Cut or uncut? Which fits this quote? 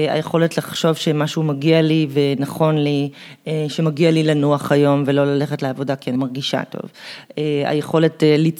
cut